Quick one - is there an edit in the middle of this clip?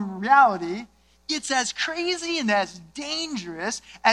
no; 0 cuts

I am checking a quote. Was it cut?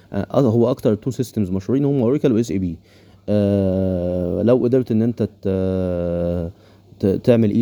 no; 0 cuts

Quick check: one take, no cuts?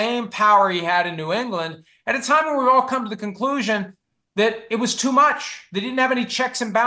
yes; 0 cuts

